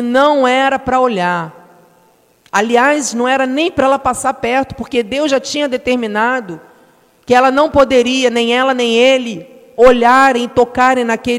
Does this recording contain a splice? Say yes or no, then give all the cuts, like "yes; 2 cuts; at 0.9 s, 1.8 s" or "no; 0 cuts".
no; 0 cuts